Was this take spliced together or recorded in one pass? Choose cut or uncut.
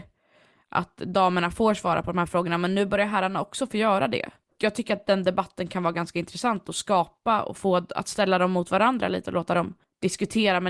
uncut